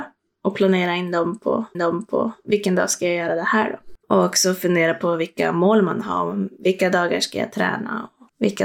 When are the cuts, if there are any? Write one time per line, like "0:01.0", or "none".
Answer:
0:01.7
0:04.0